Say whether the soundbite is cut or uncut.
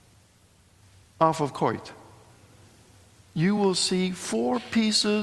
uncut